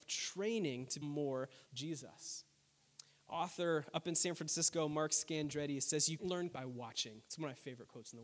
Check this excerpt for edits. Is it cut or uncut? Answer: cut